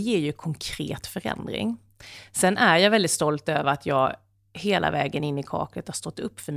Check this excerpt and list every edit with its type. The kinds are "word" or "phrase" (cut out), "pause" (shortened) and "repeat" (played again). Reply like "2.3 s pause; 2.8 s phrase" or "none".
none

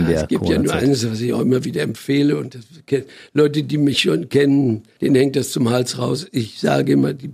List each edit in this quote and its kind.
none

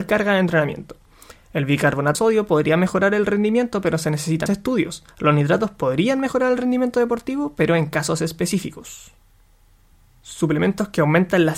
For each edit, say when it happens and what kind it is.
2.1 s word; 4.5 s word; 5.1 s pause

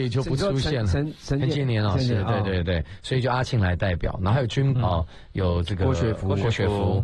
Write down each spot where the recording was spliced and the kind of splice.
4.8 s word

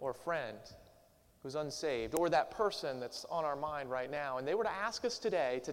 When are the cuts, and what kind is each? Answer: none

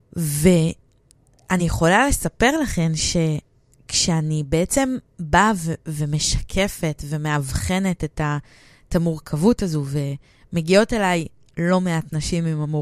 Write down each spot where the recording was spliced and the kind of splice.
none

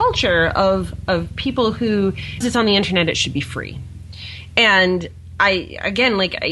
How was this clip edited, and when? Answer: 2.4 s word

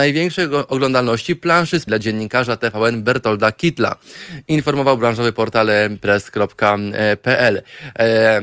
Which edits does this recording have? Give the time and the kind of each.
1.9 s word

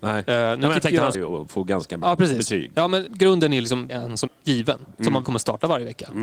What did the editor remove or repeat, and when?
1.1 s word; 2.0 s word; 3.1 s word; 3.9 s word; 4.3 s word; 5.2 s word

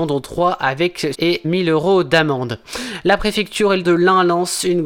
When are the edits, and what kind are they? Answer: 1.1 s word; 1.4 s word; 3.8 s word

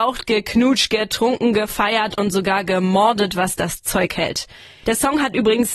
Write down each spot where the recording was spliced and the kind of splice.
none

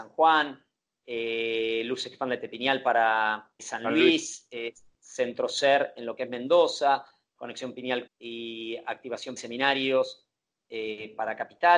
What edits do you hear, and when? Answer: 3.6 s word; 8.1 s word; 9.4 s word

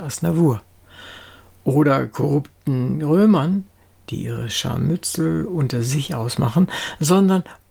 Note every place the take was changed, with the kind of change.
none

